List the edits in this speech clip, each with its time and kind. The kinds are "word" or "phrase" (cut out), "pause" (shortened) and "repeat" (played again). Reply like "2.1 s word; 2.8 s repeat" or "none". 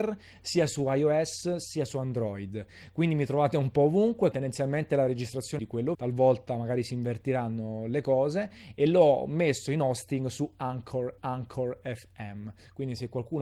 4.3 s word; 5.6 s word; 5.9 s word; 11.2 s repeat